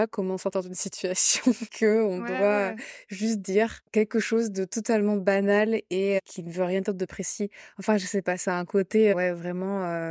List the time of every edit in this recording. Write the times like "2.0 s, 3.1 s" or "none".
1.7 s, 3.9 s